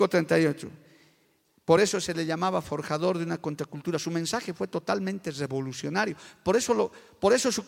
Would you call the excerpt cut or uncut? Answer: uncut